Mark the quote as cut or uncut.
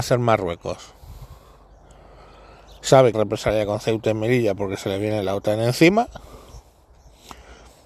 cut